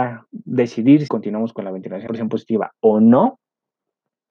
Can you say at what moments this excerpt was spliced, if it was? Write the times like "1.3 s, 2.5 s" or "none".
1.1 s, 2.1 s